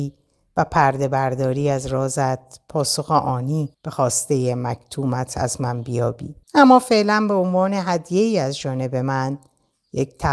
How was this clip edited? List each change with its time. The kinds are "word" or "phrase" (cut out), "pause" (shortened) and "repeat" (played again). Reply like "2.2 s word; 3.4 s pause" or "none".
3.7 s pause; 6.4 s pause